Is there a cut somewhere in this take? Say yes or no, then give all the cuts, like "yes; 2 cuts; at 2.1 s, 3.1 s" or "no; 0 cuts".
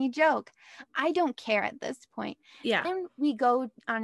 no; 0 cuts